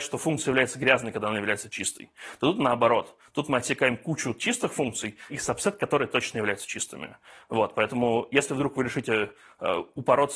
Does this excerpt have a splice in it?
yes; 1 cut; at 5.3 s

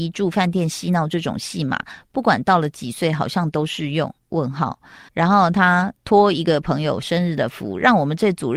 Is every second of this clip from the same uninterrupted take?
no; 1 cut; at 5.1 s

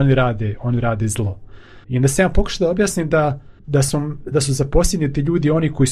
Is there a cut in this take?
yes; 2 cuts; at 1.8 s, 3.6 s

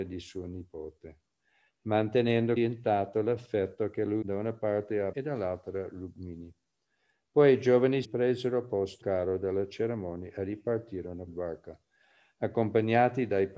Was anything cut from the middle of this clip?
yes; 6 cuts; at 2.6 s, 4.2 s, 5.1 s, 8.0 s, 9.0 s, 11.3 s

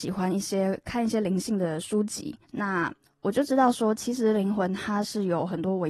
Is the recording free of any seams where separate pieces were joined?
no; 1 cut; at 2.4 s

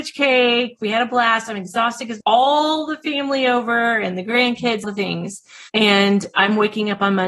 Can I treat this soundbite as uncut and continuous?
no; 3 cuts; at 2.2 s, 4.8 s, 5.7 s

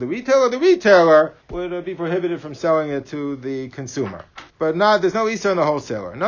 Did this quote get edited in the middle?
yes; 2 cuts; at 1.4 s, 4.5 s

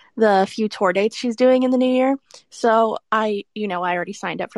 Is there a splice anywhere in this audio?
no; 0 cuts

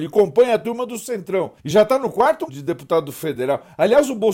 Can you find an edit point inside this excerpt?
yes; 2 cuts; at 1.6 s, 2.5 s

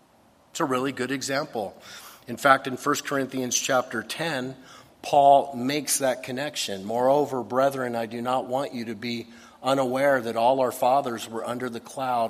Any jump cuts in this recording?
no; 0 cuts

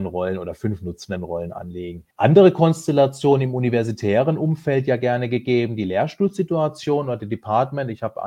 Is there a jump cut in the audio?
yes; 1 cut; at 2.1 s

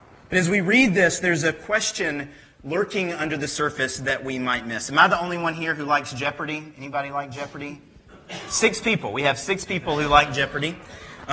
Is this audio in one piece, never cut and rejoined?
yes; 0 cuts

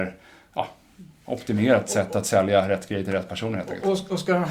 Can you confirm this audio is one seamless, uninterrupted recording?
yes; 0 cuts

